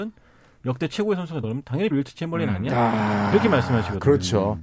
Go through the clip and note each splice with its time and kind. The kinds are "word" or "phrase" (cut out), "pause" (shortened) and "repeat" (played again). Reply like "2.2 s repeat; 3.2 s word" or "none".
1.4 s word; 1.9 s word